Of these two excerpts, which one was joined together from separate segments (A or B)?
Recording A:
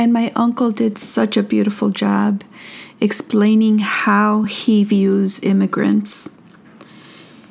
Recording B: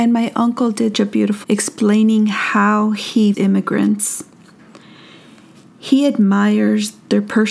B